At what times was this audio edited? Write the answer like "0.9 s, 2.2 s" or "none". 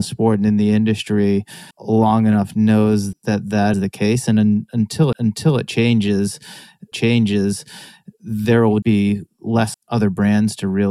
1.7 s, 3.1 s, 3.7 s, 5.1 s, 6.9 s, 8.8 s, 9.7 s